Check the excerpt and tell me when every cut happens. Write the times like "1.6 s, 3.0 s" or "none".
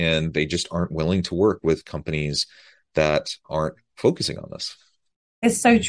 3.4 s